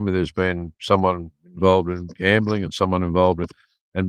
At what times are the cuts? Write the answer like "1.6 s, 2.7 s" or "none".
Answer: none